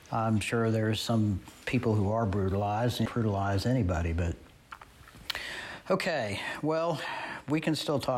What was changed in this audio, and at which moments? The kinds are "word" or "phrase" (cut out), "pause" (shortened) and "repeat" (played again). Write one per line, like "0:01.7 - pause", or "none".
0:03.1 - phrase